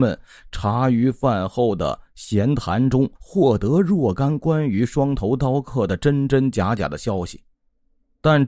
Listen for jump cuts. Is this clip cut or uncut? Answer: cut